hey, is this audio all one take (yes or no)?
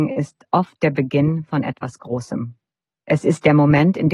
yes